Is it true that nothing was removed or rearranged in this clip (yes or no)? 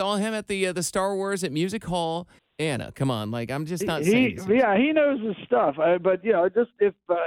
no